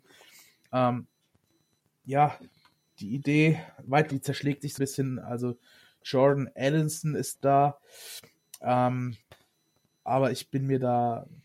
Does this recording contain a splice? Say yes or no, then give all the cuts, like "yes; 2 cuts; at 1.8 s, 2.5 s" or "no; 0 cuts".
yes; 4 cuts; at 4.1 s, 4.8 s, 6.0 s, 7.3 s